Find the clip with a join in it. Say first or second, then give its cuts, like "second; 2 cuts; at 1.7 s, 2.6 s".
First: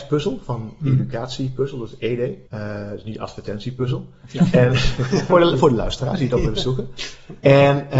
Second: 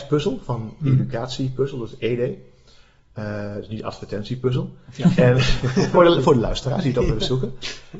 first; 1 cut; at 2.5 s